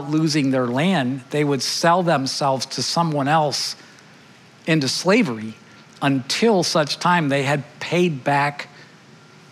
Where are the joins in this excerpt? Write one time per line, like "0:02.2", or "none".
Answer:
none